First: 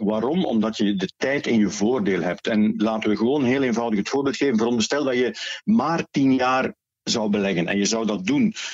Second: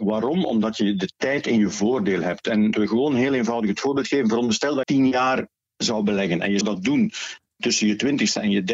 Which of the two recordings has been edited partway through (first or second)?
second